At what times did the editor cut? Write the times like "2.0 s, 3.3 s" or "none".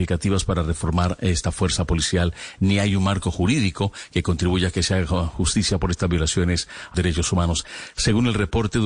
6.9 s